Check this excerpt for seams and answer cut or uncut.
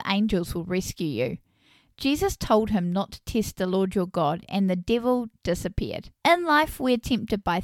cut